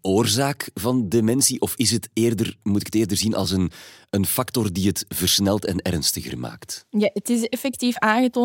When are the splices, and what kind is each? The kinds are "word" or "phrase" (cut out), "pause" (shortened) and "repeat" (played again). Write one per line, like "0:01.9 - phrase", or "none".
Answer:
none